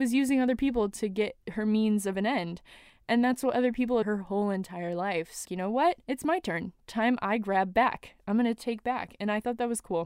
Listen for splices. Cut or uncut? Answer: cut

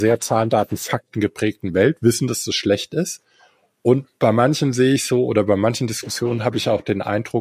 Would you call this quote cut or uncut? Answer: uncut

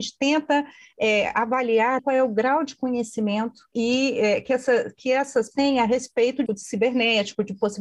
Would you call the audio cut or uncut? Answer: cut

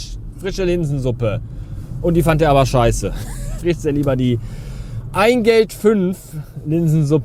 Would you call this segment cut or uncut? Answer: cut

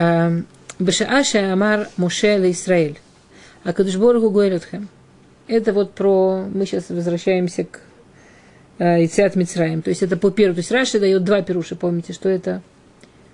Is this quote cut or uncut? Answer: uncut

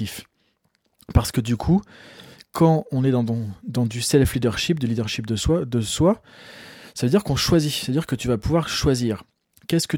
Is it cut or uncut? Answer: uncut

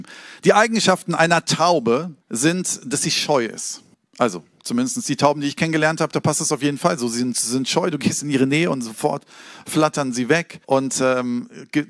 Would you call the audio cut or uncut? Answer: cut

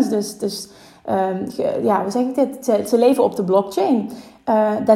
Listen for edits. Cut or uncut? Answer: uncut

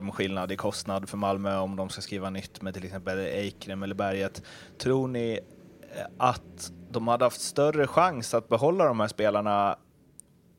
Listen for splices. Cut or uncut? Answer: uncut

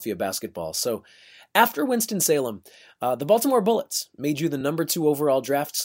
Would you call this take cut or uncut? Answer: uncut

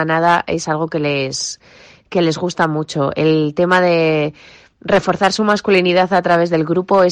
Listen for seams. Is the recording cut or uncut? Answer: uncut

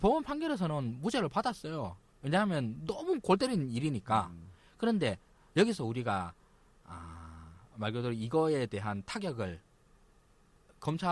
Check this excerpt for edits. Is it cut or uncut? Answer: uncut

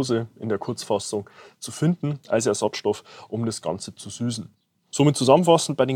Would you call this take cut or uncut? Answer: uncut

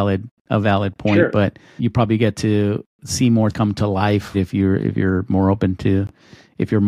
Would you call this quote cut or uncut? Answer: cut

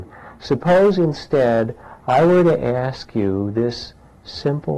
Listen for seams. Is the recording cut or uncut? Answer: uncut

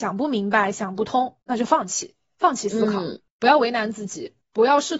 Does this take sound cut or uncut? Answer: cut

